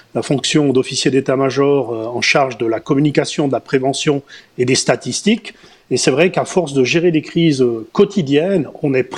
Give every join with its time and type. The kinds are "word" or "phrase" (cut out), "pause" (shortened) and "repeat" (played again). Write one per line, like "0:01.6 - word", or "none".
none